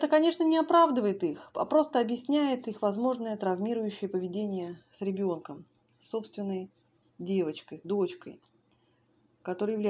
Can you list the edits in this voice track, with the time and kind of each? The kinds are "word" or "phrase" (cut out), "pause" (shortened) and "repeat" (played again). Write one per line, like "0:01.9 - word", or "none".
none